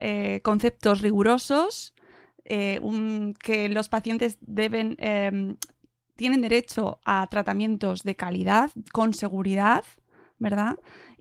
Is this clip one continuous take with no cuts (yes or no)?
yes